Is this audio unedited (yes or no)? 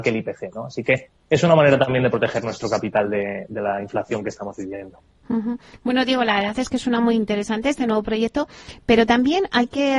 yes